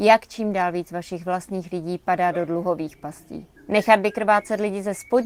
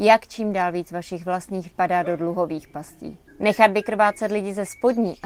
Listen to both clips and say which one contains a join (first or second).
second